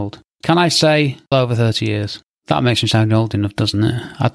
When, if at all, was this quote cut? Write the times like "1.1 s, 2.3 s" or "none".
1.3 s